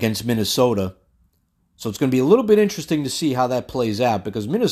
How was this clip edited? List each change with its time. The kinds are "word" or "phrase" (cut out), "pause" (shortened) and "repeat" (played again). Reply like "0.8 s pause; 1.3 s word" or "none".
none